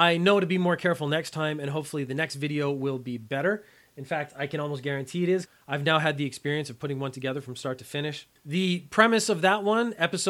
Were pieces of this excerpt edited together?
no; 0 cuts

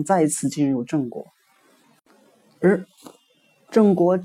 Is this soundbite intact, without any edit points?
yes; 0 cuts

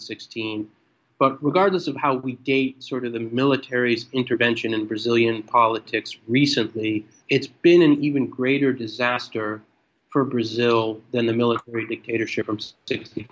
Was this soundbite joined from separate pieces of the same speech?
no; 0 cuts

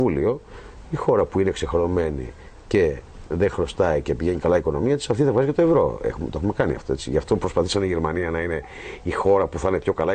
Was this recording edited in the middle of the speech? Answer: no; 0 cuts

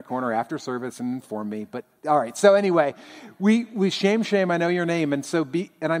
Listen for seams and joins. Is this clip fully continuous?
yes; 0 cuts

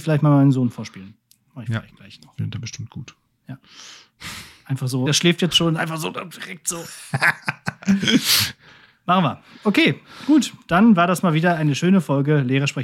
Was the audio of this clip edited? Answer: yes; 1 cut; at 5.1 s

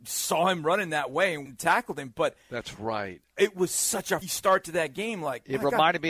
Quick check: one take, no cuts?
no; 2 cuts; at 1.5 s, 4.2 s

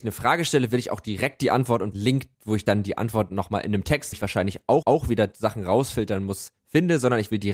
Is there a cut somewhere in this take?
yes; 4 cuts; at 1.9 s, 2.3 s, 4.1 s, 4.8 s

